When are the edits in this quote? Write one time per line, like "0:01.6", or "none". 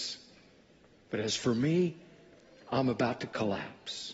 none